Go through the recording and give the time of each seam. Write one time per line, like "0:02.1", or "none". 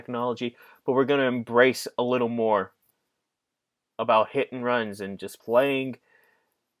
0:05.4

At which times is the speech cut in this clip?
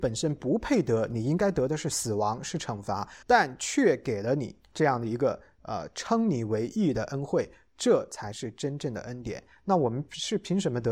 0:03.2
0:04.6

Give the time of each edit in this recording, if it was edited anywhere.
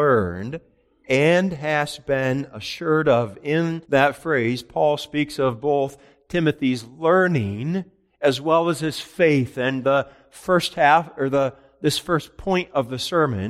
0:03.8

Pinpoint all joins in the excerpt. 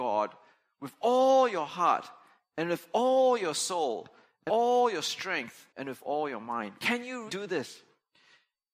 0:04.5
0:05.7
0:07.3

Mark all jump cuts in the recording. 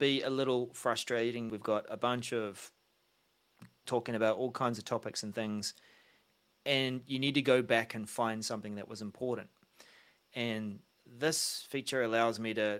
0:01.5
0:03.8

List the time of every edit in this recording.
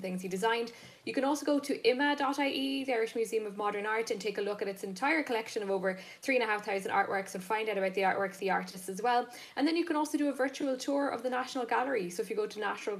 0:08.4

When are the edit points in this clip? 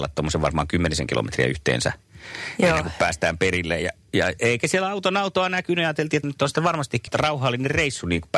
0:06.2
0:07.1

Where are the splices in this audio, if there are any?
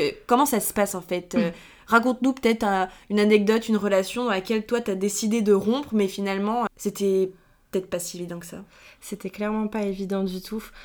0:06.7

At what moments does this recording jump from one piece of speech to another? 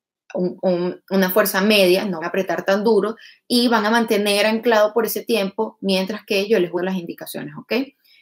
0:02.2
0:06.8

